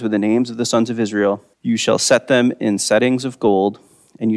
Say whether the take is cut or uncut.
cut